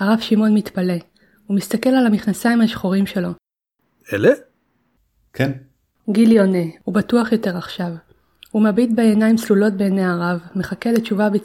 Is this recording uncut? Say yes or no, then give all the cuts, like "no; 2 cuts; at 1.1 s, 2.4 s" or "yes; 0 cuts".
yes; 0 cuts